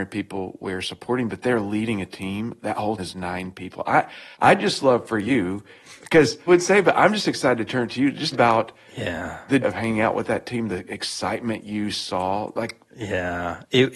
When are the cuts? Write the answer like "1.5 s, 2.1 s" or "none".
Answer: 3.0 s, 4.3 s, 6.5 s, 8.3 s, 9.6 s